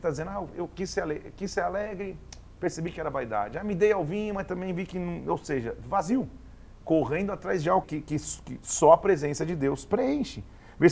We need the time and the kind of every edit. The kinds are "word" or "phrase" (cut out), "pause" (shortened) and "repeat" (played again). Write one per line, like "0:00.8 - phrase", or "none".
0:07.8 - word